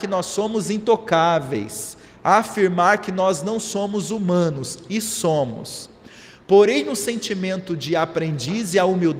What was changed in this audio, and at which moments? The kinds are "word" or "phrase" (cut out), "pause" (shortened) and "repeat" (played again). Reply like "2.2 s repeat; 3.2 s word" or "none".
2.1 s pause